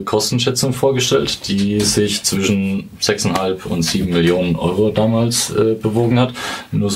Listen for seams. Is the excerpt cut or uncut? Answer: uncut